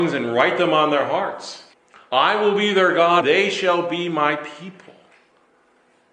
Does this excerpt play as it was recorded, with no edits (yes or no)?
no